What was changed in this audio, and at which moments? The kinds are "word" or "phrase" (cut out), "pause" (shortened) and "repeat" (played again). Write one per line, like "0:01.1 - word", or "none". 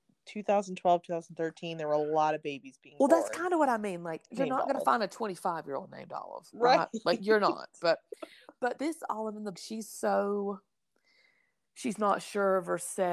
0:04.3 - word
0:08.8 - word
0:09.5 - word